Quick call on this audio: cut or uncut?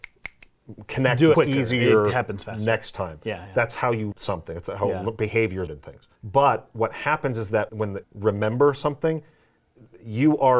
cut